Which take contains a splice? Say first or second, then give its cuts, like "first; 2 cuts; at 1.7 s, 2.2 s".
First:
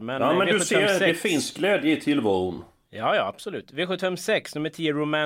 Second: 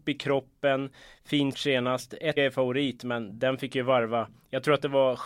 second; 2 cuts; at 1.5 s, 2.4 s